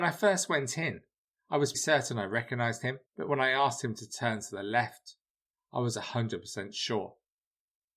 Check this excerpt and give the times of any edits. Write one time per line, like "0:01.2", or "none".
0:01.7
0:03.0